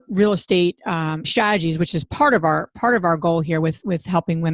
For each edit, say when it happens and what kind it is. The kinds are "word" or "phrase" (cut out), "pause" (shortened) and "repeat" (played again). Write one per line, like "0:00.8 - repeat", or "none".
0:01.2 - word